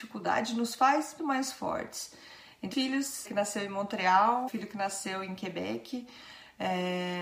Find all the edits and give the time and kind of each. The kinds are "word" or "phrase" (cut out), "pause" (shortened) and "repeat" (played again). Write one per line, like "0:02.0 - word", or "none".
0:01.2 - word
0:02.7 - phrase
0:03.2 - phrase
0:04.5 - word